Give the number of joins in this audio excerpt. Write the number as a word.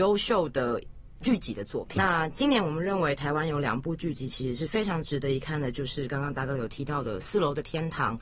one